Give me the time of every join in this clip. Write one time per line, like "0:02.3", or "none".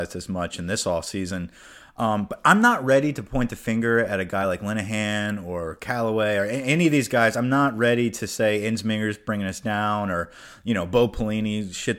none